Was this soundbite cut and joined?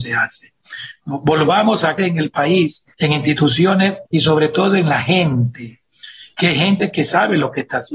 yes; 3 cuts; at 2.0 s, 2.9 s, 4.1 s

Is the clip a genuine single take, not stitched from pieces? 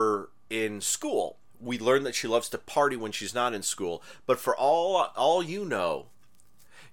no; 1 cut; at 1.5 s

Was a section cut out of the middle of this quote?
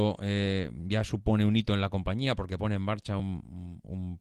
no; 0 cuts

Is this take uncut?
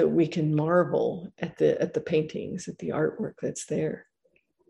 yes; 0 cuts

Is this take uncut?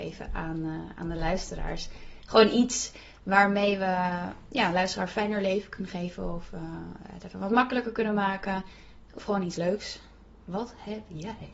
yes; 0 cuts

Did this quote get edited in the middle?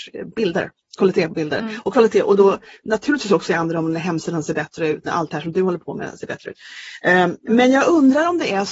no; 0 cuts

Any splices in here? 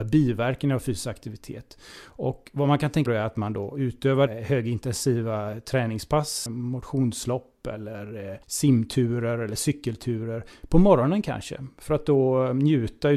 yes; 4 cuts; at 3.1 s, 4.3 s, 6.5 s, 8.4 s

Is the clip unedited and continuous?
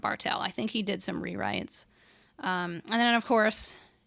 yes; 0 cuts

